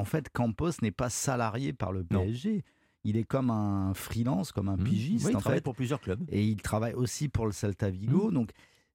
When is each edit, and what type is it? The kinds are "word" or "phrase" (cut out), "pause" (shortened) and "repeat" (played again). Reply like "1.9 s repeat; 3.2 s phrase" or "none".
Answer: none